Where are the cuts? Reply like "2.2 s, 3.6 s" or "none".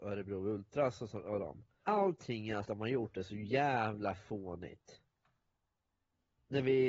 1.8 s, 2.6 s